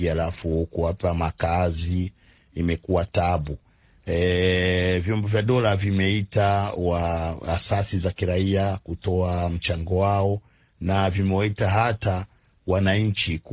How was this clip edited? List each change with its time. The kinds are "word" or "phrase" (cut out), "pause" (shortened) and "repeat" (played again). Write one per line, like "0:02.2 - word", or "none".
none